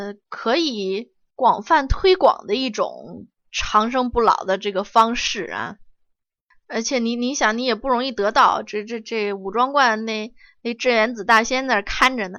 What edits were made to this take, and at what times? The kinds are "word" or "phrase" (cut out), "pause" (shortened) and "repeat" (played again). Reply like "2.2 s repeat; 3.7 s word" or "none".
none